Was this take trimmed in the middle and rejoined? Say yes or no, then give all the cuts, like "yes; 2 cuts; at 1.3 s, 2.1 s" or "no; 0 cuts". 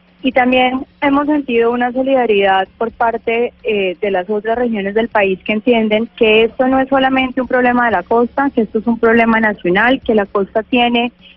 yes; 1 cut; at 6.1 s